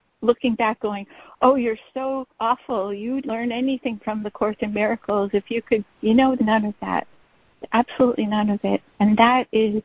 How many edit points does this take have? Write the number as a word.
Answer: five